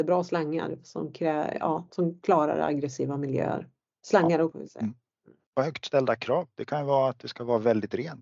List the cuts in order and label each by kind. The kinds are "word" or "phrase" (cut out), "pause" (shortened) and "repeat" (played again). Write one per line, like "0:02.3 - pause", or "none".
0:04.5 - word